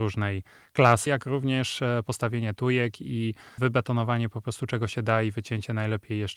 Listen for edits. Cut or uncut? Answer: cut